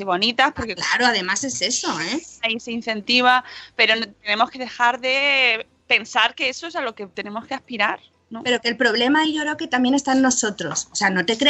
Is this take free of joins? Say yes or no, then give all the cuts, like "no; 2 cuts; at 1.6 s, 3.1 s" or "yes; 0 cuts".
yes; 0 cuts